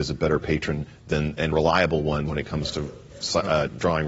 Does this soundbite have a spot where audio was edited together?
yes; 1 cut; at 1.5 s

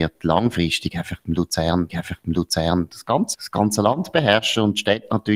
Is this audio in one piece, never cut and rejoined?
no; 2 cuts; at 1.9 s, 3.3 s

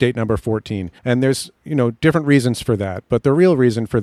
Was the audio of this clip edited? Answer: yes; 2 cuts; at 1.0 s, 1.6 s

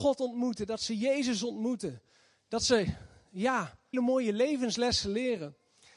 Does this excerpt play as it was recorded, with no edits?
no; 1 cut; at 3.9 s

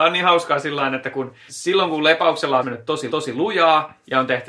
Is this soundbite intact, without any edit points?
no; 3 cuts; at 1.5 s, 2.6 s, 3.1 s

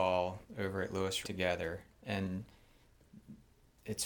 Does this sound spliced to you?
yes; 1 cut; at 1.2 s

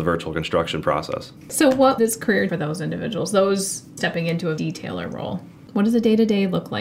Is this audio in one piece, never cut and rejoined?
no; 5 cuts; at 1.4 s, 2.0 s, 2.5 s, 4.0 s, 4.6 s

